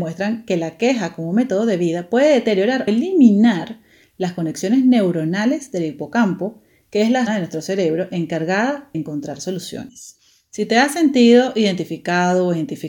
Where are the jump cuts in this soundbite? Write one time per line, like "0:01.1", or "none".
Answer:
0:02.9
0:07.3
0:08.9